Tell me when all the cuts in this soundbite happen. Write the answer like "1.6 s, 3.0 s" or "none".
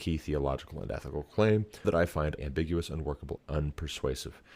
1.8 s, 2.4 s, 3.4 s